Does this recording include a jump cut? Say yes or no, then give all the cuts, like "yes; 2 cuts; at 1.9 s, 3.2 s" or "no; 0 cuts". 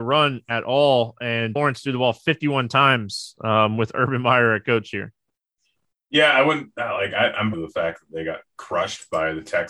yes; 2 cuts; at 1.6 s, 7.5 s